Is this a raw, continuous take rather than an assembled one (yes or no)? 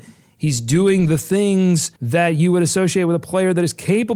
no